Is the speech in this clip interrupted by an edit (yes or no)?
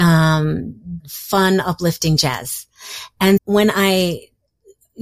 yes